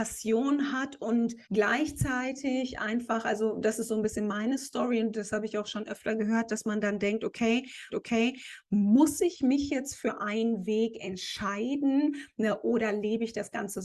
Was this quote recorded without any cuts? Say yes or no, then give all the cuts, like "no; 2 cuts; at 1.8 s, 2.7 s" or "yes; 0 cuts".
no; 2 cuts; at 1.4 s, 7.9 s